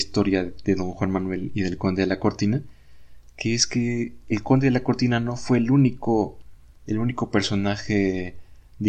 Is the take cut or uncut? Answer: uncut